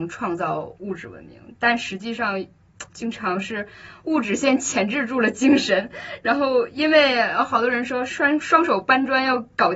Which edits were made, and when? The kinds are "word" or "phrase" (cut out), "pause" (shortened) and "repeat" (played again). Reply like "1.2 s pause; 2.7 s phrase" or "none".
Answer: 2.9 s pause